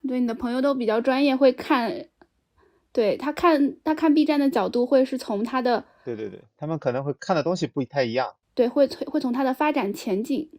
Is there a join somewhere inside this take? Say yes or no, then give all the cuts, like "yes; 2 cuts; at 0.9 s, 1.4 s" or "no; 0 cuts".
yes; 1 cut; at 8.4 s